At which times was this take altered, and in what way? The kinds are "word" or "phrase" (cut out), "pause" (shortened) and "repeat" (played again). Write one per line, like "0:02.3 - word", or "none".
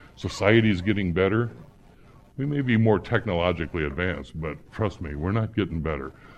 none